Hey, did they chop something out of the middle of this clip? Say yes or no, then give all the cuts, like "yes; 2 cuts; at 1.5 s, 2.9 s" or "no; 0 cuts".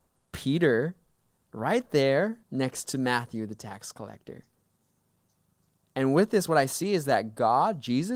yes; 1 cut; at 2.4 s